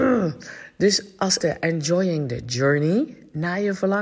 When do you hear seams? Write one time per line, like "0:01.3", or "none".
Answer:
0:01.4